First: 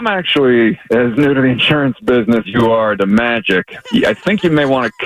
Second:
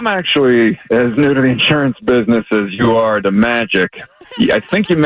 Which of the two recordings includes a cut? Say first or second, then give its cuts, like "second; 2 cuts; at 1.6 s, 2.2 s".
first; 2 cuts; at 2.4 s, 3.8 s